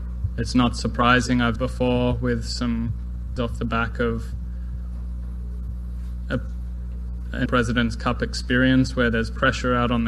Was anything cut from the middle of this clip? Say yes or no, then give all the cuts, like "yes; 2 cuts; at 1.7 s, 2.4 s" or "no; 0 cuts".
yes; 3 cuts; at 1.6 s, 3.4 s, 7.5 s